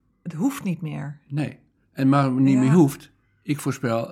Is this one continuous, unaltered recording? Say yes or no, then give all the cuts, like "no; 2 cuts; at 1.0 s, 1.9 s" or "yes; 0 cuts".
yes; 0 cuts